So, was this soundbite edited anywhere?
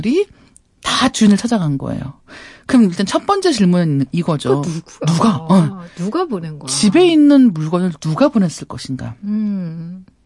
no; 0 cuts

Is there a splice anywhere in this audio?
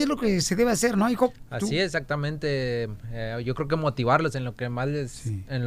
no; 0 cuts

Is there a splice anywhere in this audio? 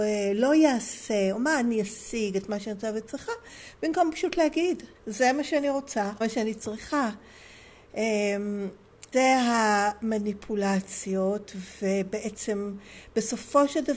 yes; 3 cuts; at 4.9 s, 6.2 s, 9.1 s

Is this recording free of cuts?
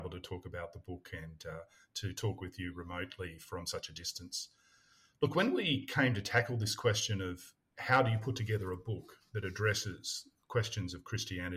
yes; 0 cuts

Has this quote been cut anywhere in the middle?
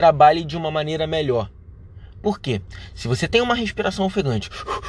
no; 0 cuts

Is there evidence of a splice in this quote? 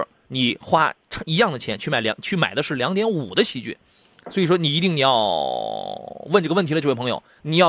no; 0 cuts

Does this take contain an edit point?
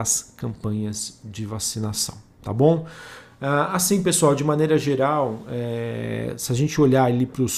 no; 0 cuts

